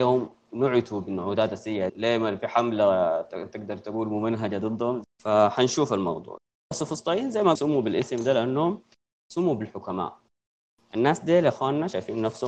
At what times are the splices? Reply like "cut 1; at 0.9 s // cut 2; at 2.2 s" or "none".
cut 1; at 1.9 s // cut 2; at 6.7 s // cut 3; at 7.6 s